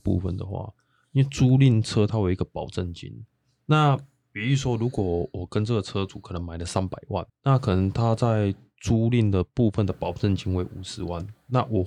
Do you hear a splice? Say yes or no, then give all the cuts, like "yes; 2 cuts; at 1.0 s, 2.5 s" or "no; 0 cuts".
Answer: yes; 1 cut; at 7.3 s